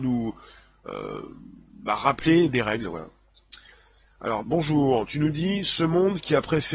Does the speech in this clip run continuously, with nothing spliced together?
no; 1 cut; at 4.4 s

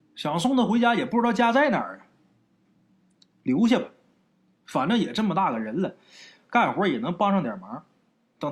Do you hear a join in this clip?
no; 0 cuts

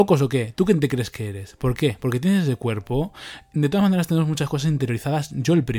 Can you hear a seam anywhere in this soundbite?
no; 0 cuts

